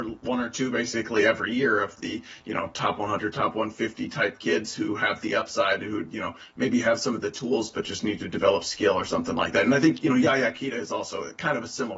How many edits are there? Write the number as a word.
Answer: zero